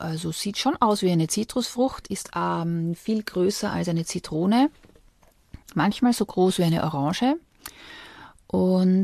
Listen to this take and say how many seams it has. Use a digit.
1